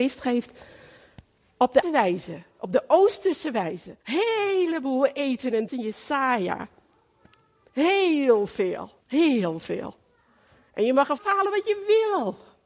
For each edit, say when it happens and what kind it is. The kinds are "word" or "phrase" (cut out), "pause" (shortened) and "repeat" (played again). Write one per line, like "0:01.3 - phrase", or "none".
0:01.8 - word
0:04.0 - pause
0:05.7 - phrase
0:09.0 - pause
0:11.2 - word